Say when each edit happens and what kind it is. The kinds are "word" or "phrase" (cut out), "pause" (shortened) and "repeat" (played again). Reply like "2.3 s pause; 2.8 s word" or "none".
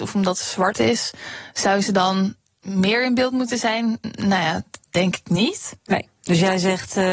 none